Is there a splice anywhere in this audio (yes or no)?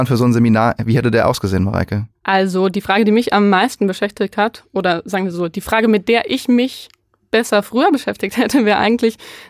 no